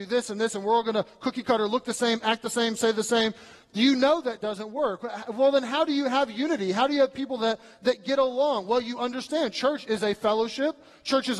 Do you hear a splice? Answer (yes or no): no